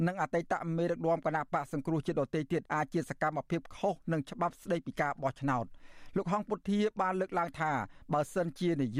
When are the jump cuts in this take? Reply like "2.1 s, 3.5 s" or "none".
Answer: 2.7 s